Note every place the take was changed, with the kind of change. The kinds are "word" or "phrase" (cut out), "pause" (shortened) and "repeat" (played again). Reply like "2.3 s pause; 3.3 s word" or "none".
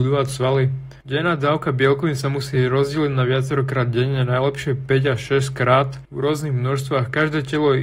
none

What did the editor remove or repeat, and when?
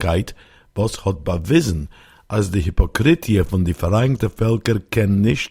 none

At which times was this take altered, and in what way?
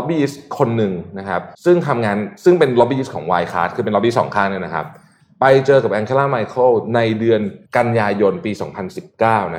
1.5 s pause; 7.7 s pause

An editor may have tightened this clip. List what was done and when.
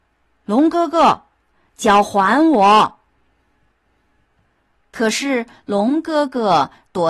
none

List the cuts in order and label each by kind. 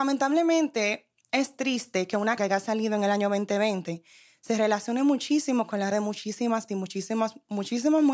2.4 s word; 5.9 s word; 6.7 s word

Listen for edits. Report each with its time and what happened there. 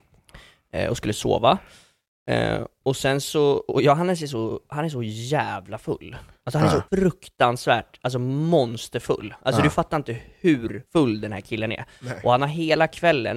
6.9 s pause; 10.9 s pause

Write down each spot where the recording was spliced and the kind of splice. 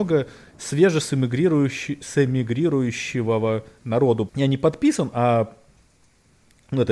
4.3 s word

